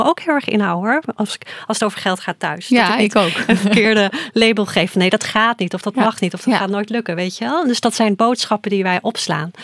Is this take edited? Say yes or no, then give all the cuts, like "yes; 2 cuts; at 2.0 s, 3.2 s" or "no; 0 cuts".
no; 0 cuts